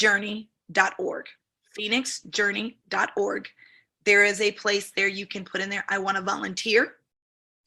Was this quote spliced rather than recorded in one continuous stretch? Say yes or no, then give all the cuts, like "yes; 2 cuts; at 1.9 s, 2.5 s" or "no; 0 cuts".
no; 0 cuts